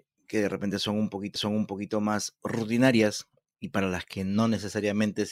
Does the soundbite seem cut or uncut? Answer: cut